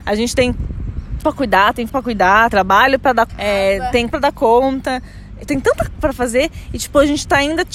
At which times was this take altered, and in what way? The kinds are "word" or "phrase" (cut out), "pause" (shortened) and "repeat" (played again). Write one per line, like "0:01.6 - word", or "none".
0:01.2 - word
0:01.9 - word
0:02.5 - word
0:03.3 - word
0:04.1 - word
0:05.5 - word
0:06.0 - word

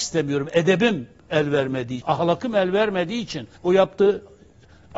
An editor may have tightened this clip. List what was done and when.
0:02.0 - word
0:03.6 - pause

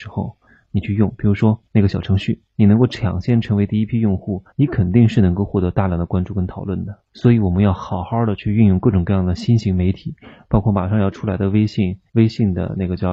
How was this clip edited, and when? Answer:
0:01.7 - pause
0:02.5 - pause
0:04.5 - pause
0:07.1 - pause
0:12.1 - pause

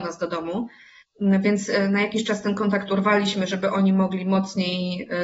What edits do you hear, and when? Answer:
0:01.0 - pause

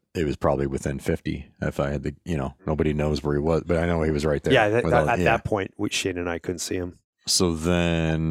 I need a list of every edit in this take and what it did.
0:02.6 - pause

